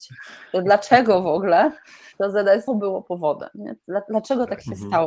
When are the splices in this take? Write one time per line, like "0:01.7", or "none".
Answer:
0:02.1
0:02.7